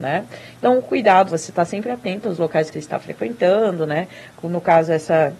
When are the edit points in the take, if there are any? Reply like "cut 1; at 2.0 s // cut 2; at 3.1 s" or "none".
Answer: cut 1; at 1.3 s // cut 2; at 2.7 s